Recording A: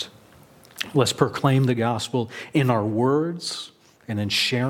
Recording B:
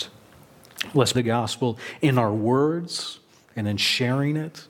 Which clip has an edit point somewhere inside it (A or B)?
B